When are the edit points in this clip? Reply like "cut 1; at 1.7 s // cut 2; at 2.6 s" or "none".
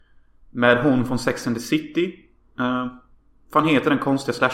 none